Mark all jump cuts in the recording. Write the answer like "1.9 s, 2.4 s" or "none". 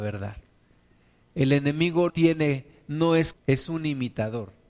2.1 s, 3.3 s